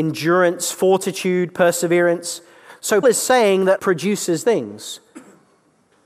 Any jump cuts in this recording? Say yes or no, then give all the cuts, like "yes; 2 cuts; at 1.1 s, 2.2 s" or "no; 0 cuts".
yes; 3 cuts; at 3.0 s, 3.8 s, 4.4 s